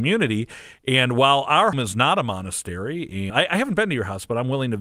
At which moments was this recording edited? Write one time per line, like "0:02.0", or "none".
0:01.7
0:03.3